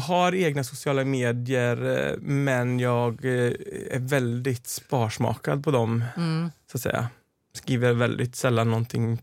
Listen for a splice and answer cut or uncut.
uncut